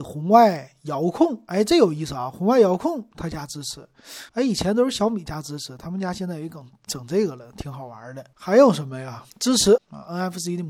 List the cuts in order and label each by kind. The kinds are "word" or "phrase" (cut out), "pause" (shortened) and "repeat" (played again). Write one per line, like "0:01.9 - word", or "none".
0:04.3 - pause
0:08.3 - pause
0:09.3 - pause
0:09.8 - word

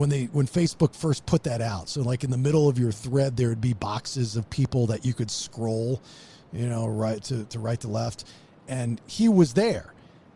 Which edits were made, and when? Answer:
none

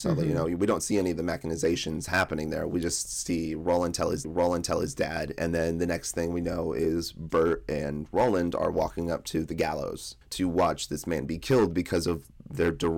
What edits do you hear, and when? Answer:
0:04.2 - repeat
0:10.2 - pause

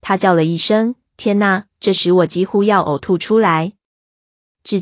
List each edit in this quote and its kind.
none

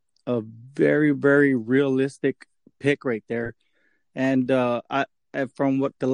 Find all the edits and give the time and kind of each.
none

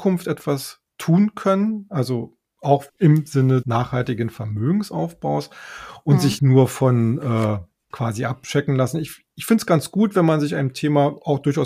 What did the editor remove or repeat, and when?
0:02.9 - word
0:03.6 - word
0:06.4 - word
0:07.9 - word

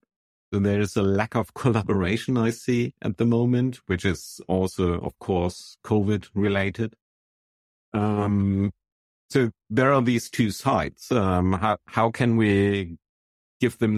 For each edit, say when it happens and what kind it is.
none

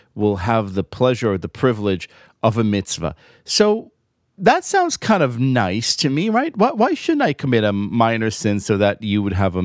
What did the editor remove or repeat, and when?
none

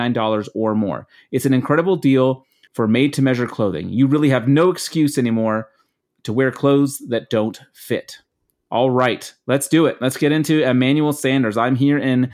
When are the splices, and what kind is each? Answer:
none

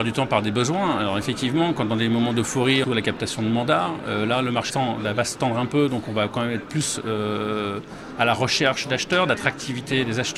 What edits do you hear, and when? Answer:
0:02.8 - phrase
0:04.7 - word

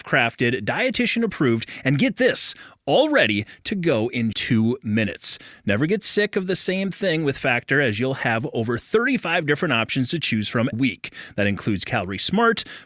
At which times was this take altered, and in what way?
0:04.3 - word
0:10.7 - word

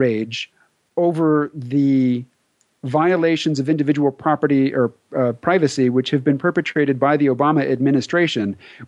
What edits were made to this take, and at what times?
none

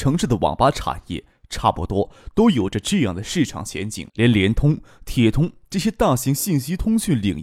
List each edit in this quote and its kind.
0:04.1 - pause

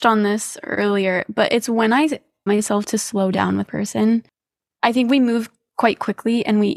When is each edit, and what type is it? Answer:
0:02.5 - word
0:03.7 - word

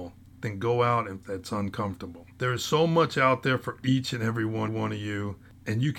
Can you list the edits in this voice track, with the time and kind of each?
0:01.2 - phrase
0:02.3 - pause
0:04.7 - repeat

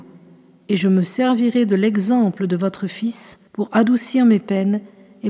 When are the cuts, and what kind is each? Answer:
0:03.5 - pause

